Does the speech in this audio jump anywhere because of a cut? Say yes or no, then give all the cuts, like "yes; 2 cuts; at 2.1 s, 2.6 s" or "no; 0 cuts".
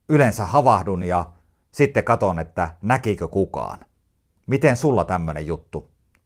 no; 0 cuts